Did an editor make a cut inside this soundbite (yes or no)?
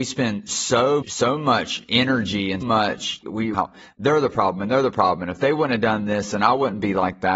yes